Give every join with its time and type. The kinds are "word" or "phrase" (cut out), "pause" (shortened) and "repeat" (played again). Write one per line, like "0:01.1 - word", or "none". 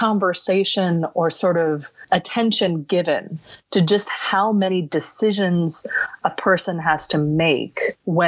none